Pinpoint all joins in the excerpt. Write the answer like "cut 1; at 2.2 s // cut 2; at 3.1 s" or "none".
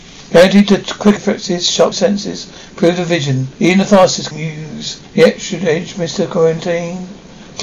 cut 1; at 1.2 s // cut 2; at 1.9 s // cut 3; at 3.5 s // cut 4; at 4.3 s // cut 5; at 5.0 s